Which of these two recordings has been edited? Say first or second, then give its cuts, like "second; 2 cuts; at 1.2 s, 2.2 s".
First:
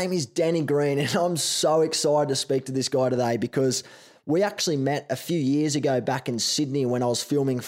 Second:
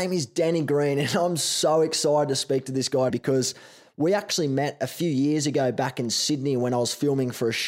second; 1 cut; at 3.1 s